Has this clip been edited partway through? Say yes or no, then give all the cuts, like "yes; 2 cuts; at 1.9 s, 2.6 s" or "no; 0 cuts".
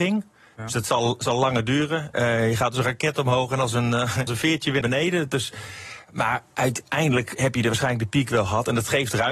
yes; 2 cuts; at 4.3 s, 4.8 s